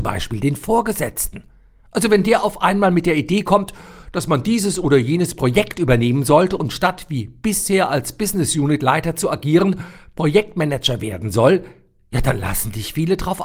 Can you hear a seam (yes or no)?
no